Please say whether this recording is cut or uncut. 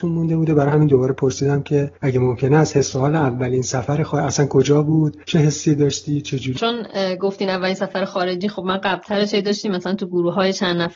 cut